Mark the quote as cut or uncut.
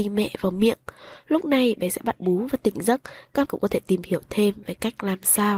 cut